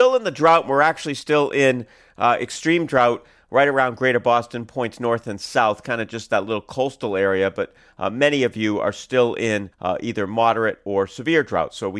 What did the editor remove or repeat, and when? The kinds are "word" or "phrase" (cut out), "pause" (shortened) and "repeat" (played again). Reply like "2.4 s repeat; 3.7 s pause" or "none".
9.7 s pause